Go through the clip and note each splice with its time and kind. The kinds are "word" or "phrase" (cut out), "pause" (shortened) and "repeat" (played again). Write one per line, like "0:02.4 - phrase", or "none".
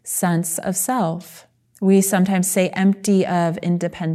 0:01.6 - pause